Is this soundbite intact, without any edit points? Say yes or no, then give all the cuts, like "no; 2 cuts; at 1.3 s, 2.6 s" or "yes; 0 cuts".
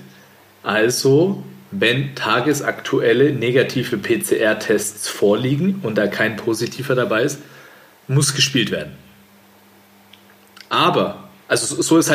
yes; 0 cuts